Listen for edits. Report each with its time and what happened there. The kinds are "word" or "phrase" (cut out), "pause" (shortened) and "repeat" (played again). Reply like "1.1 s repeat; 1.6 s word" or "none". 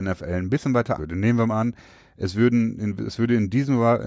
1.0 s word

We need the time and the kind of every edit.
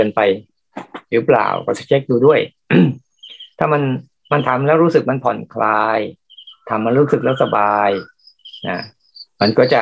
none

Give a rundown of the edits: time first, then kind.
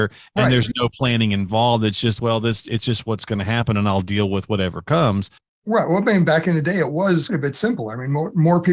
7.3 s word

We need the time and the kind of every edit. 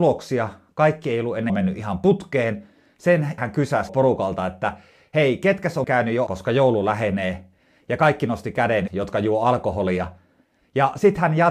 1.5 s word; 3.4 s word; 3.9 s word; 5.8 s word; 6.3 s word; 8.9 s word

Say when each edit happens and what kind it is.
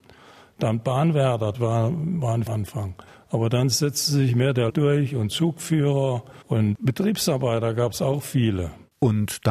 1.5 s word; 2.5 s phrase; 3.1 s pause; 4.7 s word; 6.4 s pause

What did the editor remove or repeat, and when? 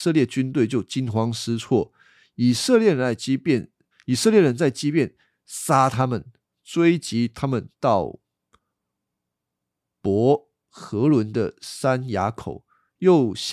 3.9 s pause

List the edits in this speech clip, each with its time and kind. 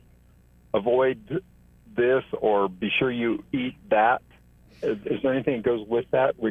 none

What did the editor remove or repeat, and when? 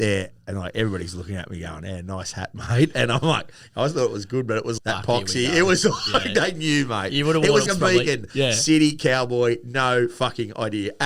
4.8 s word; 7.7 s word

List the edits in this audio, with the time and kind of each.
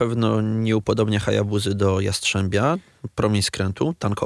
none

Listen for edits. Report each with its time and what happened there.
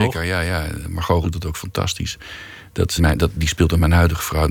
1.2 s word; 3.0 s word

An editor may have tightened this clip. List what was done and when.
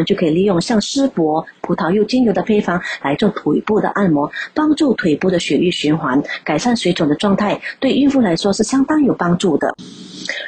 1.6 s phrase

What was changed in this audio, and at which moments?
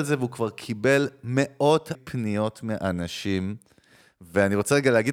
1.9 s word

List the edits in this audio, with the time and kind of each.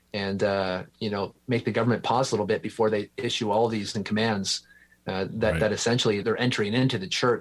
1.4 s pause; 3.9 s word; 6.2 s word

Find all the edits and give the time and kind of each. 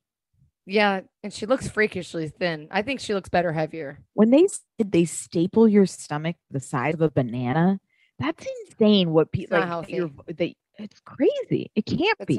4.1 s pause; 4.7 s pause; 8.7 s pause

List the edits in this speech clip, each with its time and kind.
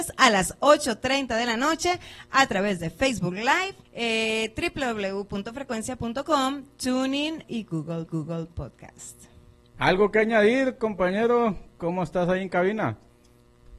3.8 s pause; 7.4 s word; 8.1 s repeat

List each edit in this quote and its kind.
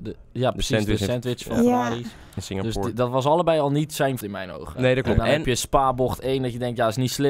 4.2 s word

